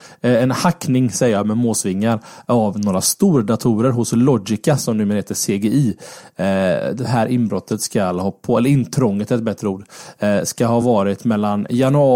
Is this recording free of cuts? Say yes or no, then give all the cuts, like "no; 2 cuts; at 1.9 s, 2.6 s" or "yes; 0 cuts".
yes; 0 cuts